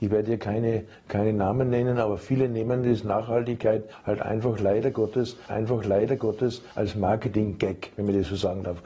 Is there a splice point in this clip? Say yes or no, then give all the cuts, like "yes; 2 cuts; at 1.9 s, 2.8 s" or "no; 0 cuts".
yes; 1 cut; at 5.5 s